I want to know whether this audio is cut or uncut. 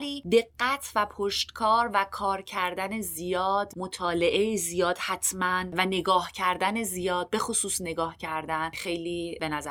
cut